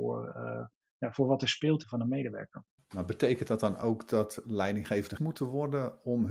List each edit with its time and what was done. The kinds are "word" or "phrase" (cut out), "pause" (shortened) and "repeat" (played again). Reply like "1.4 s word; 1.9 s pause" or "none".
1.8 s phrase; 5.2 s word